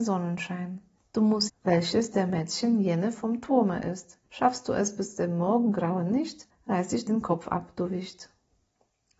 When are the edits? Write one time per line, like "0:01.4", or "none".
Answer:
0:01.0
0:01.5
0:04.2
0:06.5
0:07.1